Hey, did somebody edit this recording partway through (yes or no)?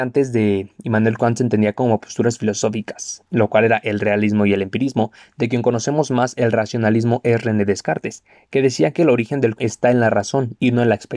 yes